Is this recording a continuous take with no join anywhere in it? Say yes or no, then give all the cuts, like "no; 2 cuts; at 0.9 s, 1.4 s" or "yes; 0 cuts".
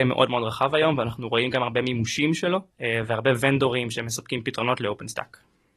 no; 1 cut; at 2.7 s